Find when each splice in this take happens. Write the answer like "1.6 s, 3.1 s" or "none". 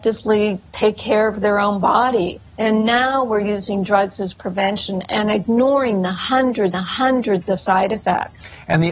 2.5 s, 6.7 s